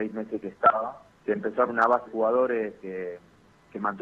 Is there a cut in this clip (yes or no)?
yes